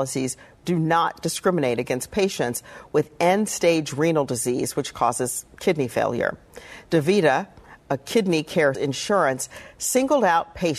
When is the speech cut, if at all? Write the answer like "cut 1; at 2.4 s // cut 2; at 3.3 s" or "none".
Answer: cut 1; at 8.7 s